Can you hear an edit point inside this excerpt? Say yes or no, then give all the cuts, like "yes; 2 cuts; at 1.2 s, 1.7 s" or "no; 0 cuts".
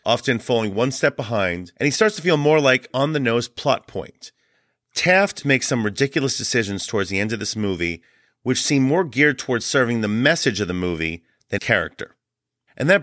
yes; 3 cuts; at 2.9 s, 5.4 s, 11.6 s